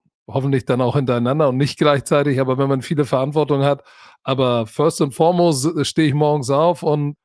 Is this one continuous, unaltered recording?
yes; 0 cuts

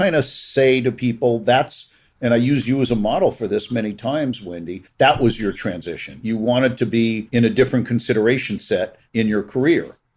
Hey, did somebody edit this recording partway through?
yes; 1 cut; at 4.9 s

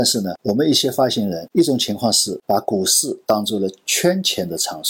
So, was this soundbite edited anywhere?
yes; 1 cut; at 3.2 s

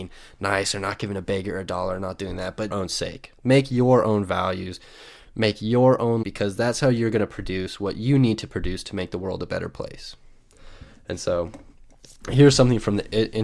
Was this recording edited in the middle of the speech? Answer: yes; 2 cuts; at 2.7 s, 6.2 s

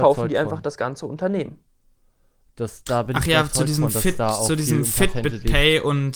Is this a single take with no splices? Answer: yes; 0 cuts

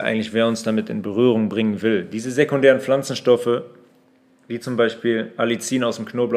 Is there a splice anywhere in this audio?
no; 0 cuts

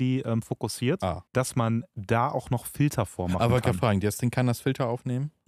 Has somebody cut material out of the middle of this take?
yes; 1 cut; at 1.3 s

